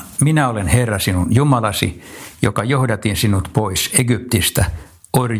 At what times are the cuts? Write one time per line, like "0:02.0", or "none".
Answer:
none